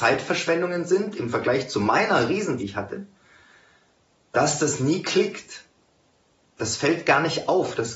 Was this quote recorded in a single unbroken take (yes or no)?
no